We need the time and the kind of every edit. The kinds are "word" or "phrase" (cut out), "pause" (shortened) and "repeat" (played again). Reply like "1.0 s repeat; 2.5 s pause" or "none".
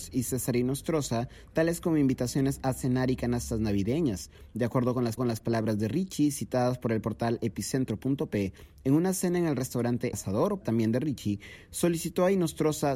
5.2 s repeat; 10.1 s word; 10.6 s word